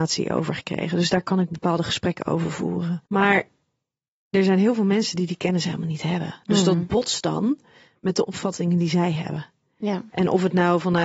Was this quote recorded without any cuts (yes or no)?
no